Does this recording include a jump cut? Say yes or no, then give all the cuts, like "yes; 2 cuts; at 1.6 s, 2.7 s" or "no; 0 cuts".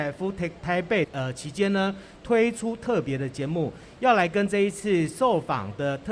yes; 1 cut; at 1.0 s